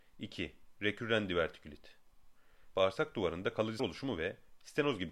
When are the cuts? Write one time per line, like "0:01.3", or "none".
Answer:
0:02.7
0:03.8